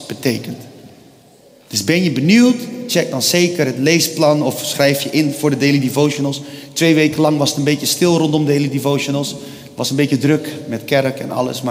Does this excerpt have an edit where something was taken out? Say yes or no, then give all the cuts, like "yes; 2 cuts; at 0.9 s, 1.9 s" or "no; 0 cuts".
no; 0 cuts